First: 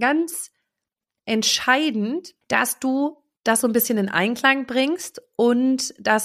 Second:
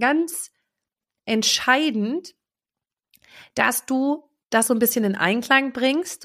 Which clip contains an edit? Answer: first; 1 cut; at 2.4 s

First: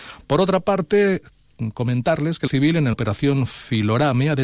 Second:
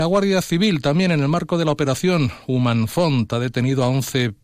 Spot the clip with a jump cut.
first; 2 cuts; at 2.5 s, 2.9 s

